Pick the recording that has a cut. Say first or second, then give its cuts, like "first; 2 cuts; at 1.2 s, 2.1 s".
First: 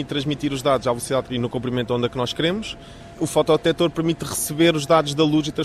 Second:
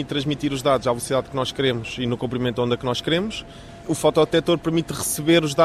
first; 1 cut; at 1.3 s